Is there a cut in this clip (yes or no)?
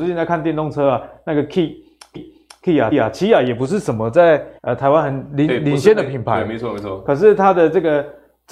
yes